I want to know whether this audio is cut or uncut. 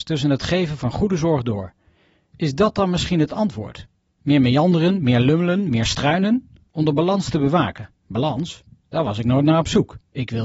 uncut